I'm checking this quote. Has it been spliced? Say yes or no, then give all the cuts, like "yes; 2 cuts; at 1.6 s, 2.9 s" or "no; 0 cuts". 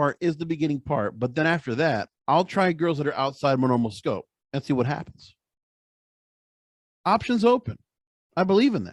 yes; 2 cuts; at 2.2 s, 4.4 s